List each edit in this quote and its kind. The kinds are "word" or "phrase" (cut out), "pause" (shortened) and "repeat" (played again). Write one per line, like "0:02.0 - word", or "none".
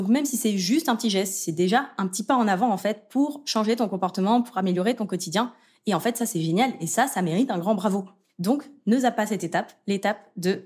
none